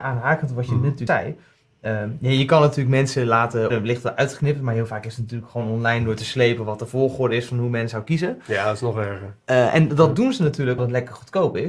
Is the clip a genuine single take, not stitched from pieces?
no; 3 cuts; at 1.1 s, 3.7 s, 10.8 s

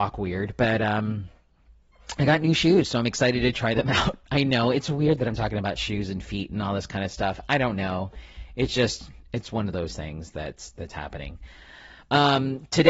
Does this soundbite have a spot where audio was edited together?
no; 0 cuts

